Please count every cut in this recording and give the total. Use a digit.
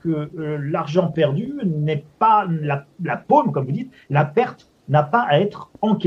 0